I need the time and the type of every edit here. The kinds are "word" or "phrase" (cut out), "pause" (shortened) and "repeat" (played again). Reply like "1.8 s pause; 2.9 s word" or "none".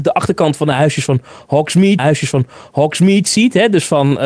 2.0 s repeat